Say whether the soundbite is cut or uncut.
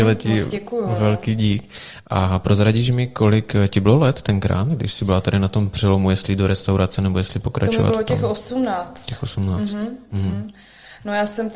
uncut